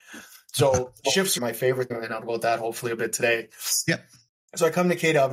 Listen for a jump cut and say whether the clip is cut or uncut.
cut